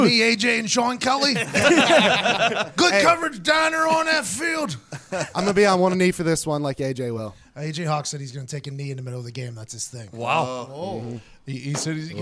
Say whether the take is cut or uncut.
uncut